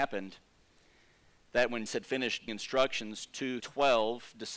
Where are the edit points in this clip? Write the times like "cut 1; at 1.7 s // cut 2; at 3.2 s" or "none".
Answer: cut 1; at 1.9 s // cut 2; at 2.5 s // cut 3; at 3.6 s